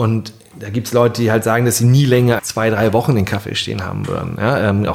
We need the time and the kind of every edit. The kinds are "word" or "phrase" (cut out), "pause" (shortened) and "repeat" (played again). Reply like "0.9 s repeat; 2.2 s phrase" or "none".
2.4 s word